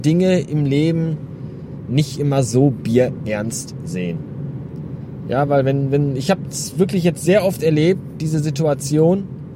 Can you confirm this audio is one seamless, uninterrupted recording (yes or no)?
yes